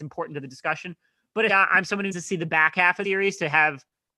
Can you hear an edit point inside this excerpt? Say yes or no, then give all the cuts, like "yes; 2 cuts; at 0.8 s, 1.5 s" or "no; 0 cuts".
yes; 3 cuts; at 1.5 s, 2.1 s, 3.0 s